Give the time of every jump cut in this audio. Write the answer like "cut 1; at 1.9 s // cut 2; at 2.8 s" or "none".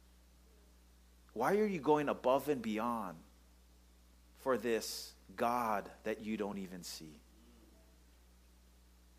none